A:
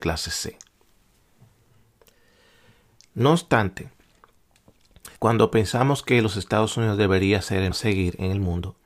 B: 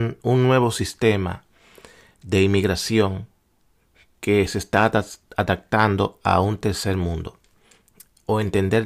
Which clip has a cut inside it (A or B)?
A